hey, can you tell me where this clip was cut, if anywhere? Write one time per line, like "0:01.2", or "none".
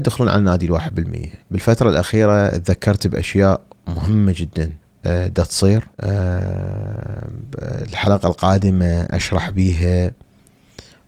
0:01.4
0:04.8
0:05.9